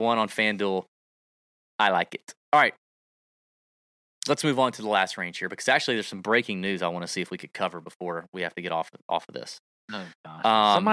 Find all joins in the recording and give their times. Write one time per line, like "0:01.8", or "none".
0:02.4